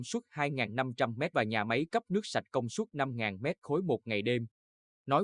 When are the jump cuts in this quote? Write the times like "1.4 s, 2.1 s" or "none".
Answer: 1.3 s